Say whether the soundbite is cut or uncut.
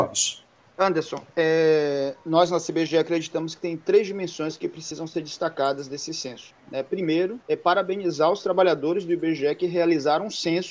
cut